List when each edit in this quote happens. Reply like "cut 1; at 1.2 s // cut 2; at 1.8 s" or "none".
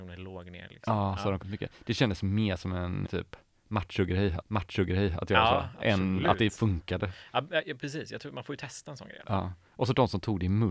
cut 1; at 1.4 s // cut 2; at 3.1 s // cut 3; at 4.4 s